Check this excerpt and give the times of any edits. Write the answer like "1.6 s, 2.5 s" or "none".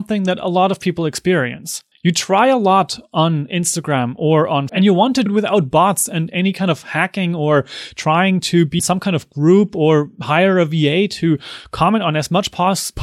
1.9 s, 4.7 s, 5.3 s, 8.8 s